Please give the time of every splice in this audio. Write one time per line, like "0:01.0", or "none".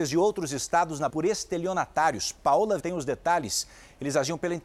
0:01.1
0:02.8